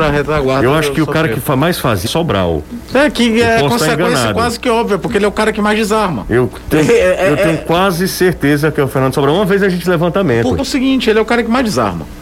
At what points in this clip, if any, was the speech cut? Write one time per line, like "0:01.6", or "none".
0:02.1
0:09.8
0:10.6